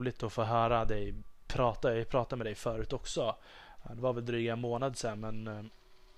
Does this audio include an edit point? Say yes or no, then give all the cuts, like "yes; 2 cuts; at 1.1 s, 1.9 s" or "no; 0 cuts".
no; 0 cuts